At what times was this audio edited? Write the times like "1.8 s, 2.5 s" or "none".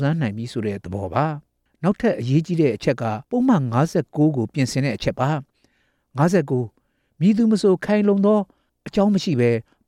3.2 s